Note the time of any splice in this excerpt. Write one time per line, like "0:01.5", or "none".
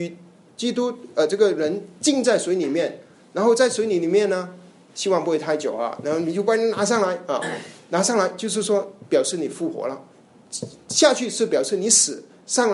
none